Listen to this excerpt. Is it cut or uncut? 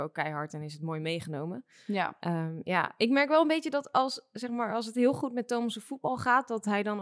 uncut